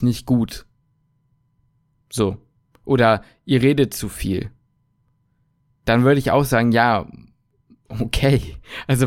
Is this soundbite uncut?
yes; 0 cuts

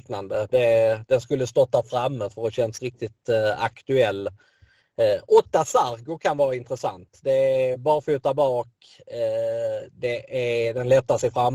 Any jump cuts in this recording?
no; 0 cuts

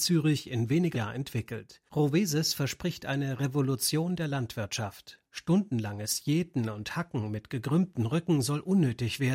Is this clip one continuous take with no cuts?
no; 2 cuts; at 0.9 s, 1.9 s

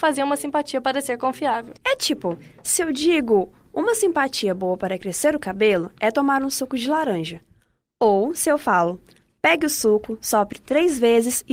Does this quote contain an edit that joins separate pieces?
yes; 1 cut; at 1.8 s

